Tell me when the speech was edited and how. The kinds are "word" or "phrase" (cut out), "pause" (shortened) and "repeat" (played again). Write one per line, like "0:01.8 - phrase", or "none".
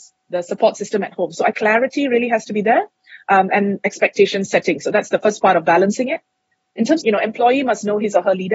0:01.5 - phrase
0:07.0 - phrase